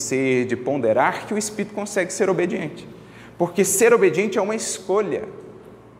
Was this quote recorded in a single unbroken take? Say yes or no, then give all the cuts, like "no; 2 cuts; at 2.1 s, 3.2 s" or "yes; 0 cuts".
yes; 0 cuts